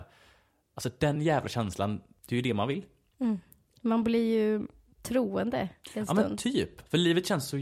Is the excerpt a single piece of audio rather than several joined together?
yes; 0 cuts

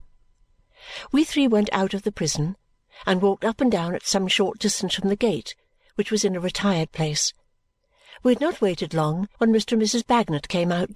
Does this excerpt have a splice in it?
yes; 1 cut; at 9.4 s

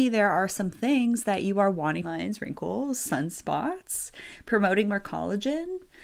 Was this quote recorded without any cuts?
no; 1 cut; at 2.0 s

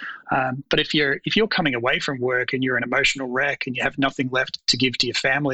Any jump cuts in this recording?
no; 0 cuts

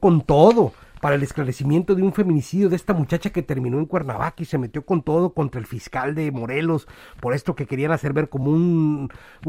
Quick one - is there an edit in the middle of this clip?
no; 0 cuts

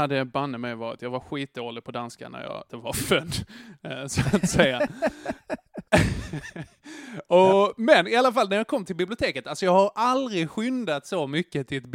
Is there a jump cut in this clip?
yes; 1 cut; at 2.7 s

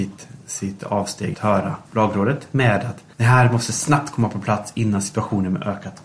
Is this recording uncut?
no; 3 cuts; at 1.3 s, 1.9 s, 3.1 s

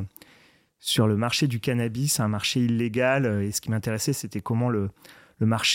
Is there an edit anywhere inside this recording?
no; 0 cuts

